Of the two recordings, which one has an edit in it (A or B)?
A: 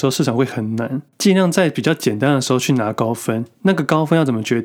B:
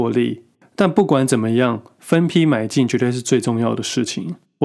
A